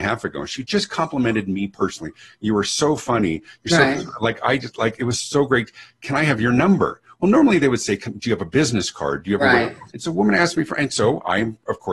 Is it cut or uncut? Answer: cut